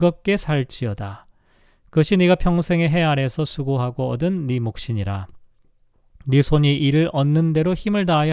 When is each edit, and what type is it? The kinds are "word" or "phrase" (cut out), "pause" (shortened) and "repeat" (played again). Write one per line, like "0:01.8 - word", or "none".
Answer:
none

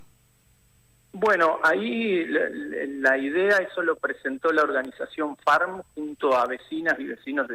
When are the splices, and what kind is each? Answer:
none

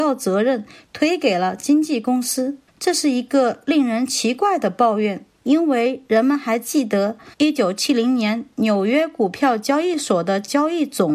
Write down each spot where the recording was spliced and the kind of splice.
0:02.7 - pause
0:05.3 - pause
0:07.3 - pause

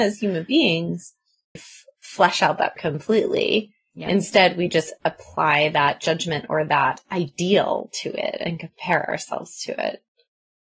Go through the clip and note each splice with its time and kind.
0:01.6 - word
0:02.8 - word

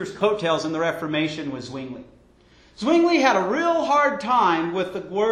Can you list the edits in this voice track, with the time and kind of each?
none

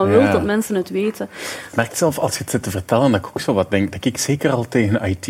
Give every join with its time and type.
none

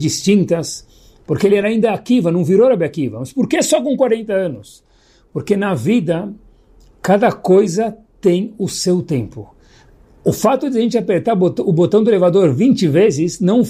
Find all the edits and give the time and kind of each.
none

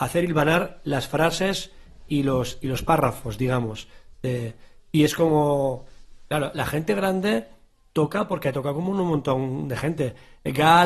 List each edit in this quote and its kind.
none

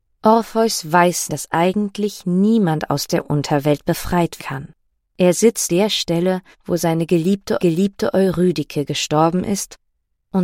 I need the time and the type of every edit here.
0:01.3 - word
0:04.4 - word
0:05.0 - pause
0:05.7 - word
0:06.5 - pause
0:07.6 - repeat

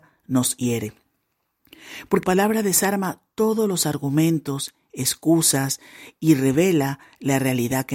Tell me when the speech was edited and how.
0:02.2 - word

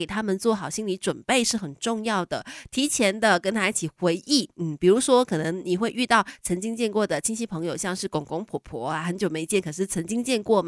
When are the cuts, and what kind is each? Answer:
none

